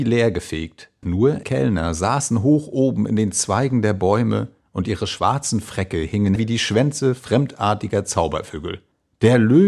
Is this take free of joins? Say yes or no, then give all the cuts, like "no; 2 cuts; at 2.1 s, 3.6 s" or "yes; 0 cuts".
no; 3 cuts; at 1.0 s, 1.4 s, 6.4 s